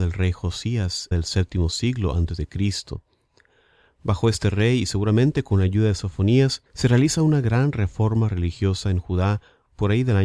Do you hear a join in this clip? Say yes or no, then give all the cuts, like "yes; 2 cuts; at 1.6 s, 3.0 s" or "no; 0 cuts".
yes; 2 cuts; at 1.1 s, 6.7 s